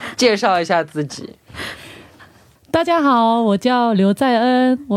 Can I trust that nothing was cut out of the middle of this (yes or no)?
yes